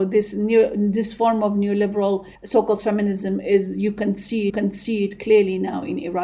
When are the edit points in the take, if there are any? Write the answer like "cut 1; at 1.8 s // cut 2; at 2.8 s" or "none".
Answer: cut 1; at 2.3 s // cut 2; at 4.5 s